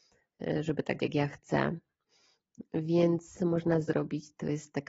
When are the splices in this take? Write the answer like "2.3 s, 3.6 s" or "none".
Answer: 1.0 s, 3.4 s